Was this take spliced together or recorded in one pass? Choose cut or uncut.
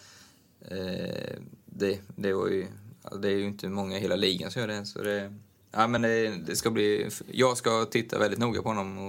uncut